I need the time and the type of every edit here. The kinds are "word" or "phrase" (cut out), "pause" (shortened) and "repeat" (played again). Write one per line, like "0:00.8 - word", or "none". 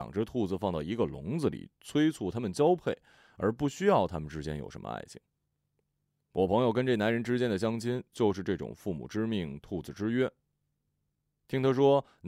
none

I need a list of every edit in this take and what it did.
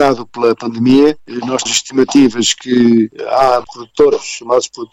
0:01.7 - word
0:03.7 - phrase

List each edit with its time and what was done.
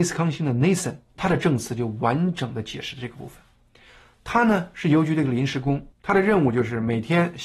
0:01.1 - pause

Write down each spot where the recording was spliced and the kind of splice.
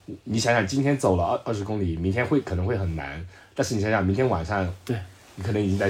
none

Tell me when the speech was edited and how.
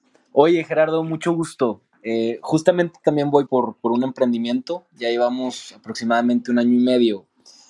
0:03.5 - word

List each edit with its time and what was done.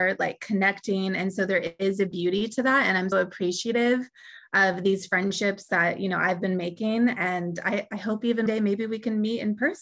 0:03.1 - word
0:08.5 - word

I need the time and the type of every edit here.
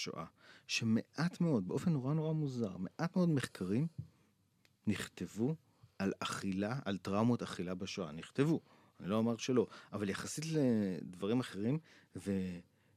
none

